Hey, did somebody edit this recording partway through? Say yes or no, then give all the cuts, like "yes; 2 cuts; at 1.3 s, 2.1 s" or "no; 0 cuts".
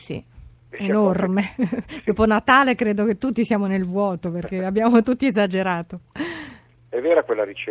no; 0 cuts